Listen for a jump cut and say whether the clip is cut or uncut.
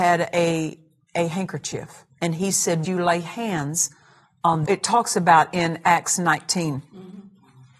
cut